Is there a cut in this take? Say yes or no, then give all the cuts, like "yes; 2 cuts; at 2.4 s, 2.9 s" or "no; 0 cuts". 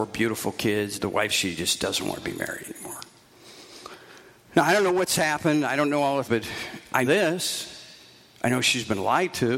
yes; 4 cuts; at 0.9 s, 1.3 s, 6.2 s, 7.0 s